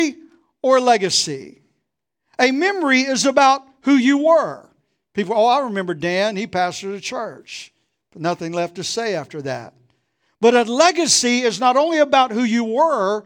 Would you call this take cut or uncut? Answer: uncut